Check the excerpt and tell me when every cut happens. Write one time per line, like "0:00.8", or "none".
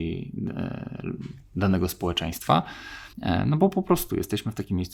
0:03.1